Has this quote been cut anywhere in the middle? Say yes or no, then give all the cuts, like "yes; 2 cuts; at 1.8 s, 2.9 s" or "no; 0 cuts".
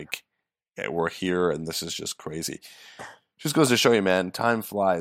no; 0 cuts